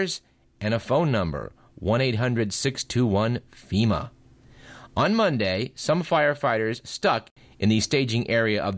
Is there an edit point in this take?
no; 0 cuts

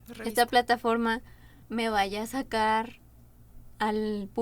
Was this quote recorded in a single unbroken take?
no; 1 cut; at 1.6 s

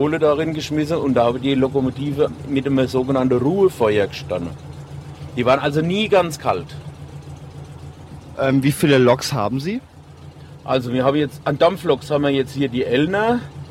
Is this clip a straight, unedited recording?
yes; 0 cuts

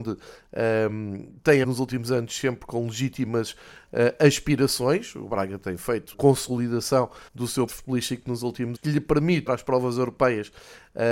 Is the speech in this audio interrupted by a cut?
yes; 6 cuts; at 1.6 s, 6.1 s, 7.3 s, 7.7 s, 8.7 s, 9.5 s

